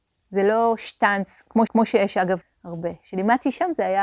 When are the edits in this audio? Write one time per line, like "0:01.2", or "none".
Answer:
0:01.7
0:02.4